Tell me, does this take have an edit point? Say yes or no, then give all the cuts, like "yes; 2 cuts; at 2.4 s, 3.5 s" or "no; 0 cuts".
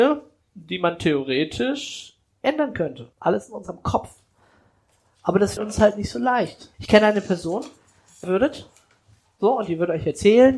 yes; 4 cuts; at 3.1 s, 5.6 s, 6.7 s, 8.2 s